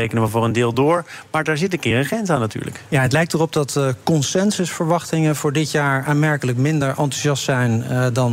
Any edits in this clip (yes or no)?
no